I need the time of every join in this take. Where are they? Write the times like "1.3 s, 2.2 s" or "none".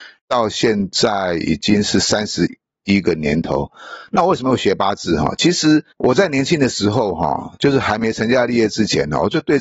5.9 s